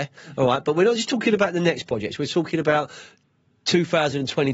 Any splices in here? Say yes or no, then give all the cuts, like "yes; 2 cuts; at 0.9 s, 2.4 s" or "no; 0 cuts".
no; 0 cuts